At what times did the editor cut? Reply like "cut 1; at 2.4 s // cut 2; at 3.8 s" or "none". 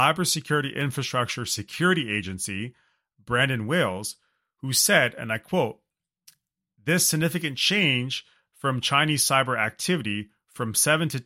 none

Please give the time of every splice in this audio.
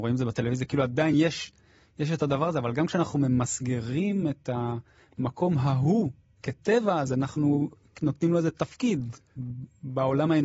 none

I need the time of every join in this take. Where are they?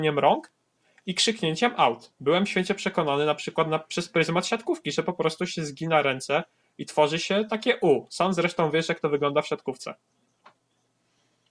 none

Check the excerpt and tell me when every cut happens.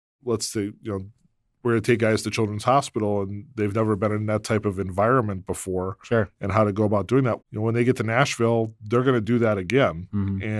cut 1; at 7.4 s

